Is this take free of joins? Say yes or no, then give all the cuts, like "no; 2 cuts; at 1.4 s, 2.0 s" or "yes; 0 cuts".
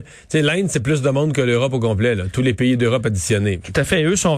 yes; 0 cuts